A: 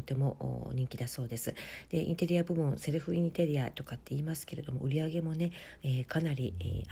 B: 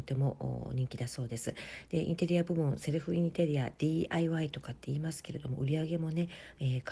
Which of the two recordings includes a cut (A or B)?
A